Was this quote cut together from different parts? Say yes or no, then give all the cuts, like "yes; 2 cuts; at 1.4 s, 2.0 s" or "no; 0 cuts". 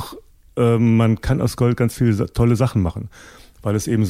no; 0 cuts